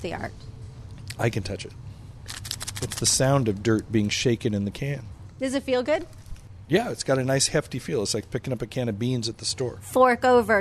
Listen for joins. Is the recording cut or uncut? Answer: uncut